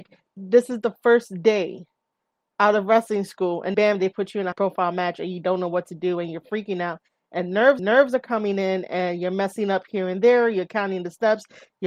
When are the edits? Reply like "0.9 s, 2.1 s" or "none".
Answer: 3.7 s, 4.5 s, 7.8 s